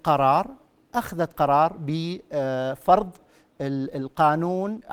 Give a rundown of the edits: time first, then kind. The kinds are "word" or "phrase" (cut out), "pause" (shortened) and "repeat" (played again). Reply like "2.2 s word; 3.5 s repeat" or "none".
none